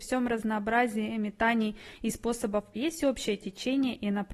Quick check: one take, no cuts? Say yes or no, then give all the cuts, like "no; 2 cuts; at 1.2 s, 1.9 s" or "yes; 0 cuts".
no; 1 cut; at 2.7 s